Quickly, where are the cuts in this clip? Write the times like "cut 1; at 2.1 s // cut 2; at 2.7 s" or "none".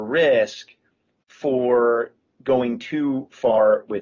none